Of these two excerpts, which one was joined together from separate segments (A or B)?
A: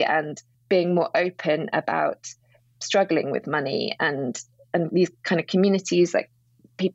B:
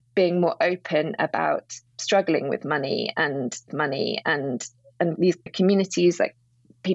B